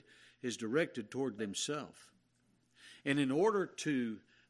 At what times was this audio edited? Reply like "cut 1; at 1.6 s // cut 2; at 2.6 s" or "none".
cut 1; at 1.4 s